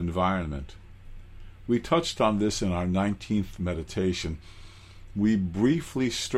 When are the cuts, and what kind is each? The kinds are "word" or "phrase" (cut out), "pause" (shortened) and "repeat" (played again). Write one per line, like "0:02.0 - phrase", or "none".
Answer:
none